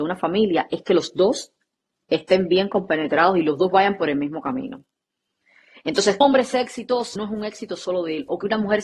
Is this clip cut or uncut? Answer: cut